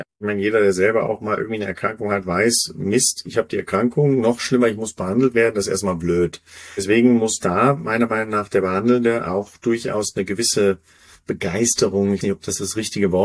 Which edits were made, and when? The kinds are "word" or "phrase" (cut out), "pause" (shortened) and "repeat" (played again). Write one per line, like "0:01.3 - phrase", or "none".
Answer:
0:12.2 - word

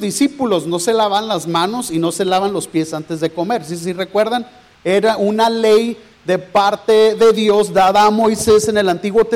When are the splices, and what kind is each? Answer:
none

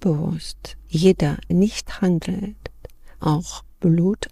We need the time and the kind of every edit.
0:01.5 - word
0:03.2 - word

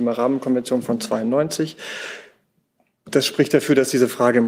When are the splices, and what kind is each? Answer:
none

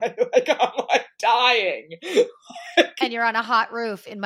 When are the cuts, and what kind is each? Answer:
none

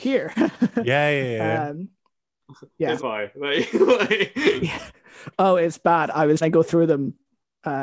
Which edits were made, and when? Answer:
0:03.0 - phrase
0:06.4 - word

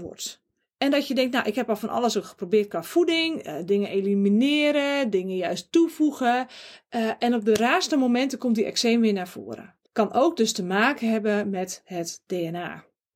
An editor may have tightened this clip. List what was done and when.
0:09.9 - pause

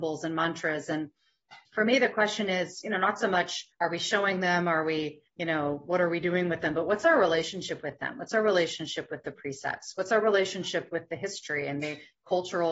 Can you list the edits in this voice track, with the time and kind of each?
0:01.7 - pause
0:03.7 - pause
0:05.3 - pause

